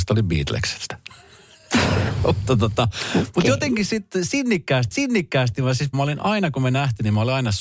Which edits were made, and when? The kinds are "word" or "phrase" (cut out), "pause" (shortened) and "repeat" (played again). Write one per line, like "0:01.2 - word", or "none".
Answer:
0:04.9 - repeat
0:05.9 - word